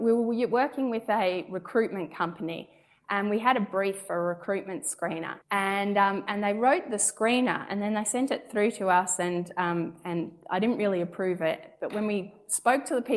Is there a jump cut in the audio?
yes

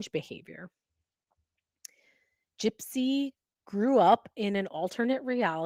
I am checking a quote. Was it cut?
no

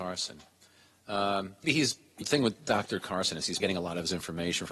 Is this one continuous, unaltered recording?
no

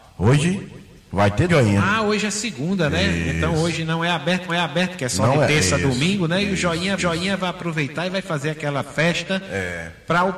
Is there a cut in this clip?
yes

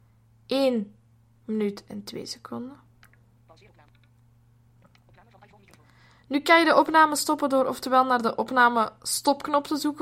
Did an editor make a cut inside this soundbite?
no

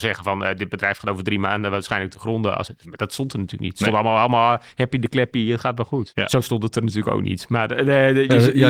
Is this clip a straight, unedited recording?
yes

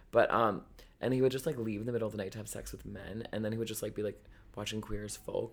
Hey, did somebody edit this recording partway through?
no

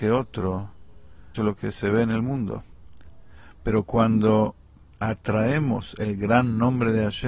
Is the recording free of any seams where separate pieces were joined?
no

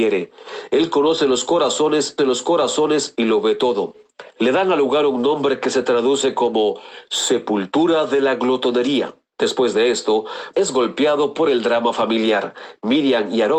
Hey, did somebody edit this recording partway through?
yes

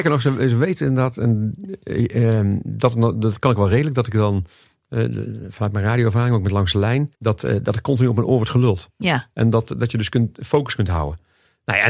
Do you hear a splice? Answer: yes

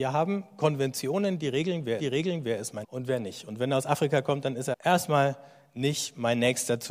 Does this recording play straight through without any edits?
no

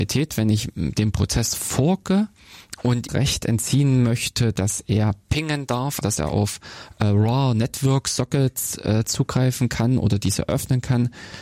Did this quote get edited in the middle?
yes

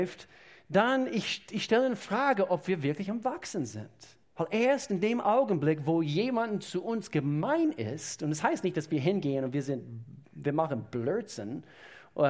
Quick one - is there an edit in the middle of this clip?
yes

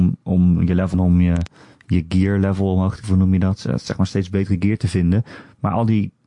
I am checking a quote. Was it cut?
yes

